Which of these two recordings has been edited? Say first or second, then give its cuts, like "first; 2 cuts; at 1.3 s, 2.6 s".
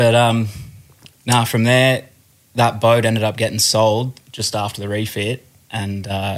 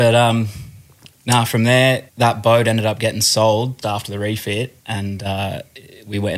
second; 3 cuts; at 2.1 s, 3.8 s, 4.8 s